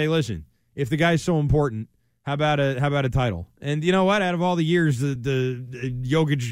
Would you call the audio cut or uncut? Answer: uncut